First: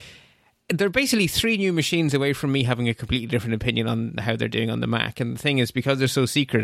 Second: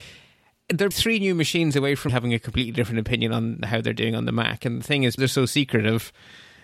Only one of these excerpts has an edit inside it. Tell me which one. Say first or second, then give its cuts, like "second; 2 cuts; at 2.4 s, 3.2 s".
second; 3 cuts; at 0.9 s, 2.1 s, 5.2 s